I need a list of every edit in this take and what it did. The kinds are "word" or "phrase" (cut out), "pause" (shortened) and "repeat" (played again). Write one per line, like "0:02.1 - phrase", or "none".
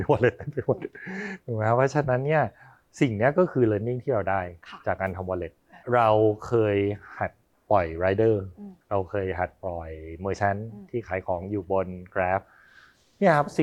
0:05.8 - pause
0:08.8 - pause